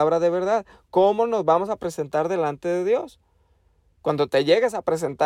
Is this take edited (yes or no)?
no